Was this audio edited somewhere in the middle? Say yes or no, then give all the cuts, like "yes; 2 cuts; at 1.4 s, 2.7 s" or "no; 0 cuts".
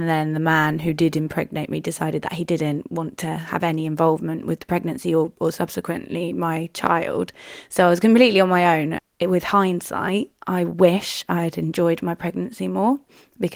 no; 0 cuts